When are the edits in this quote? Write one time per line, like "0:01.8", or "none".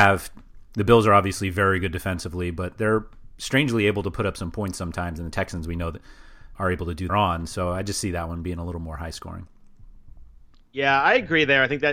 0:06.5
0:07.1